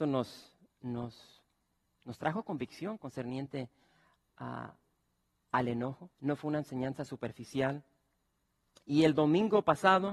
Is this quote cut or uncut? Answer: uncut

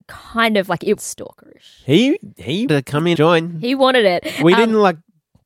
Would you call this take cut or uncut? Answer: cut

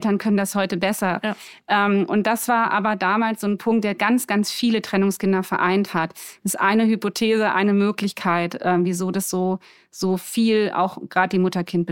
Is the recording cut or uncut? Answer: uncut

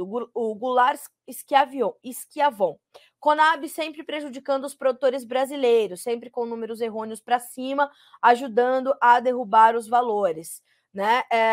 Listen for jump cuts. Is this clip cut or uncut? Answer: uncut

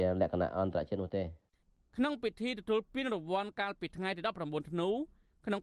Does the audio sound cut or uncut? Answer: uncut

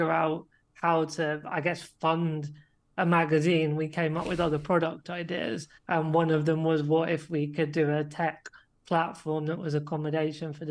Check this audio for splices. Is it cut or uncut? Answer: cut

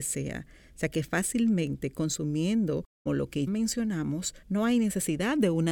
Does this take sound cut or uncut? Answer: cut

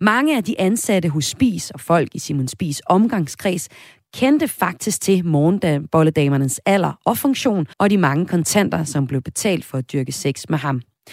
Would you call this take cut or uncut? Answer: cut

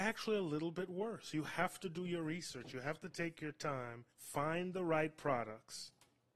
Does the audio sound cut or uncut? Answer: cut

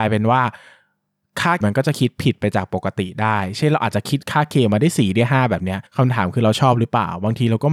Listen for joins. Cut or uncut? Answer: cut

